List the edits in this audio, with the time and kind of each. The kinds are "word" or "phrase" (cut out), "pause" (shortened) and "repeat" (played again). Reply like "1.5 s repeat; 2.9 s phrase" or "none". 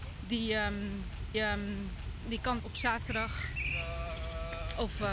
1.3 s repeat; 2.6 s word